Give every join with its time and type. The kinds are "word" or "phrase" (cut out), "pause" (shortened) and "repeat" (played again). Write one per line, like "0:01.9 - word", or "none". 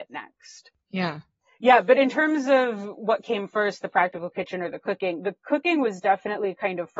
none